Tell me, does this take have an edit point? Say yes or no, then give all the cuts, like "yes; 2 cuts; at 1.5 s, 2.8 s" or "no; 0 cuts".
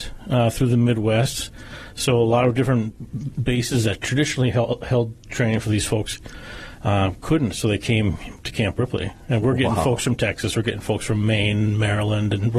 no; 0 cuts